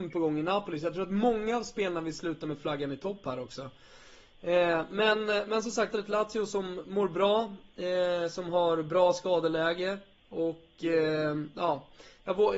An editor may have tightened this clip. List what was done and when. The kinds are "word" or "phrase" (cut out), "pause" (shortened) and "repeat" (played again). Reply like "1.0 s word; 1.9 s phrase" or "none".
5.9 s phrase